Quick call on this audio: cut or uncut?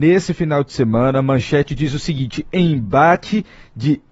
uncut